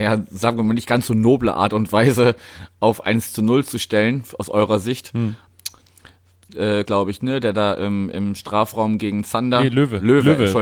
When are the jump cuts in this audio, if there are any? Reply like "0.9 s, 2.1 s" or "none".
6.8 s